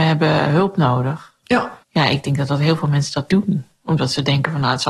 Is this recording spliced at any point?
yes; 2 cuts; at 1.8 s, 3.3 s

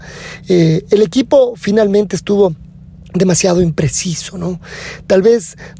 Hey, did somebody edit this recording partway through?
no; 0 cuts

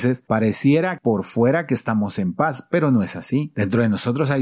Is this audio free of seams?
yes; 0 cuts

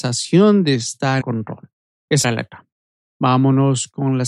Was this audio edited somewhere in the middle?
yes; 2 cuts; at 1.2 s, 2.2 s

